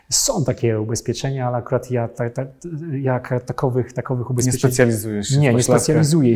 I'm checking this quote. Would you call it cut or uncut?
uncut